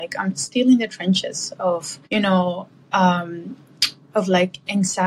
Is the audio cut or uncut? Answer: cut